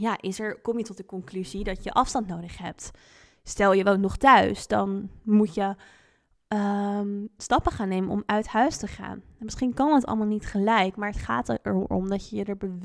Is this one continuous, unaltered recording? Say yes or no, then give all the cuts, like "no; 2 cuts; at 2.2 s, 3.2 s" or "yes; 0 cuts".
yes; 0 cuts